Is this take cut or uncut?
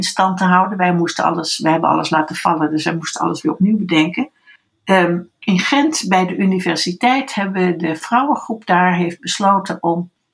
uncut